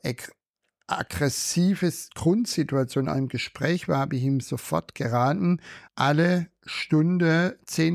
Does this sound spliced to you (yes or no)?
yes